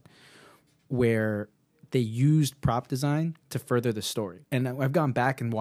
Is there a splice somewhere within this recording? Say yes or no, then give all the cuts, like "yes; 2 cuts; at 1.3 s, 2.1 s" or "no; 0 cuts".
yes; 2 cuts; at 3.4 s, 4.4 s